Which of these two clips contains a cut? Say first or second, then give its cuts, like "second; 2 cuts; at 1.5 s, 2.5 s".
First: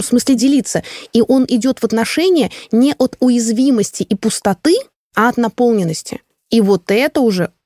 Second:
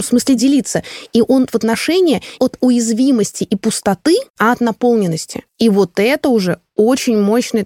second; 4 cuts; at 1.5 s, 2.4 s, 4.3 s, 5.5 s